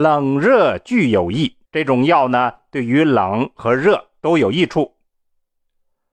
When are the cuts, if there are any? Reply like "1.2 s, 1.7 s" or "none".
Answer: 1.7 s